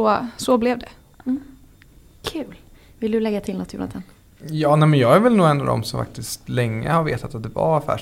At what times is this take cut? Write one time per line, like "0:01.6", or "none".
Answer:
none